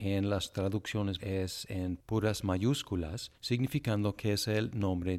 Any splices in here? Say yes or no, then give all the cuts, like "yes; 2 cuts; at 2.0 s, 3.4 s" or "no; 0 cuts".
yes; 2 cuts; at 1.2 s, 3.3 s